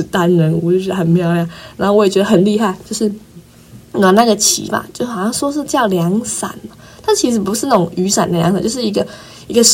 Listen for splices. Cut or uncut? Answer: uncut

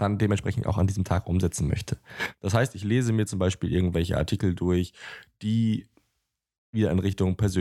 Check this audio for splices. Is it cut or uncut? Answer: uncut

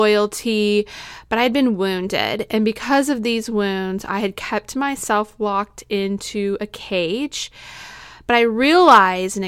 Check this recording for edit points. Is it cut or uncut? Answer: uncut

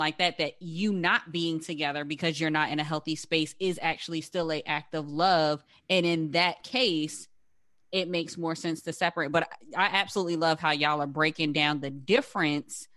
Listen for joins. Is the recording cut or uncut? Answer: uncut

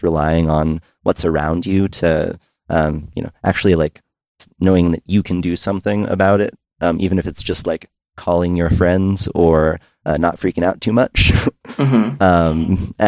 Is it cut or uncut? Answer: uncut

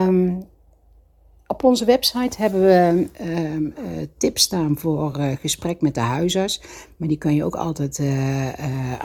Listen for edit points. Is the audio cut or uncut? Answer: uncut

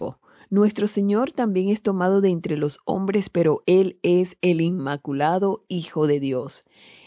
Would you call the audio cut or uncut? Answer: uncut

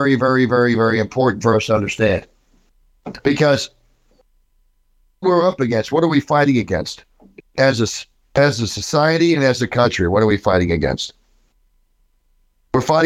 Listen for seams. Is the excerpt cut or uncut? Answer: cut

